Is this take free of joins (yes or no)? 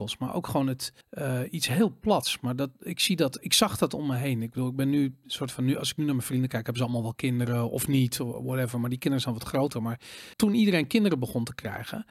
no